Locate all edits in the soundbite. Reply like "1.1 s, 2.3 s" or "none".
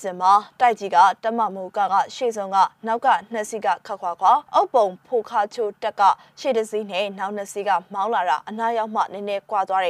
4.5 s